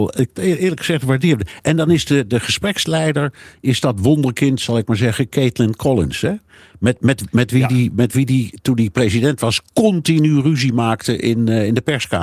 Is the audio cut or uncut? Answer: uncut